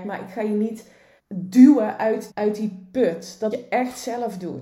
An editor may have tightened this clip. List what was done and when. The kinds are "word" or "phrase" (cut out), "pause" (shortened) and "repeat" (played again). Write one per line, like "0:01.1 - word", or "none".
0:01.2 - pause
0:02.3 - word
0:03.5 - word

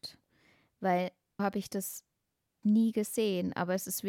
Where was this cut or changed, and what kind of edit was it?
0:01.4 - word
0:02.6 - word

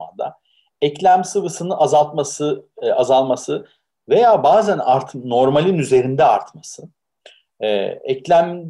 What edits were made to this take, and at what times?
none

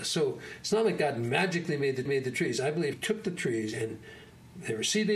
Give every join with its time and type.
0:02.1 - repeat
0:02.9 - word

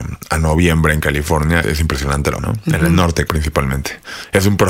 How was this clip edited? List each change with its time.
0:01.6 - word
0:02.4 - word
0:03.3 - word

